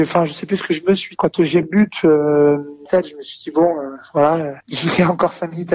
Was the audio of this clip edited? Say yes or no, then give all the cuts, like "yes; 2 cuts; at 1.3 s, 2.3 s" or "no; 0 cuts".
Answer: yes; 4 cuts; at 1.1 s, 1.6 s, 2.9 s, 4.6 s